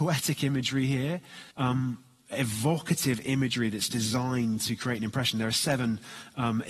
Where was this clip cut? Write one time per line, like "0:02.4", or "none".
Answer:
0:01.5